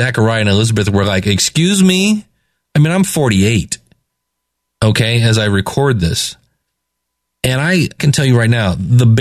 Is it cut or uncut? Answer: cut